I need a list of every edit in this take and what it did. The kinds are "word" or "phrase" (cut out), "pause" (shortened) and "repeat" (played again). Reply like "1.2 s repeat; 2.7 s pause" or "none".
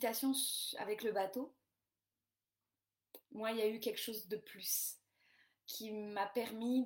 3.2 s pause